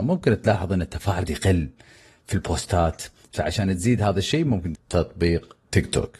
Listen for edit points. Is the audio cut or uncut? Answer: cut